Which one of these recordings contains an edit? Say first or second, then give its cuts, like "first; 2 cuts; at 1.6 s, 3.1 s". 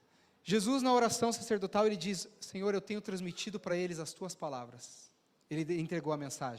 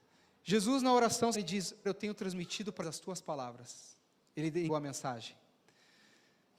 second; 4 cuts; at 1.3 s, 1.9 s, 2.8 s, 4.7 s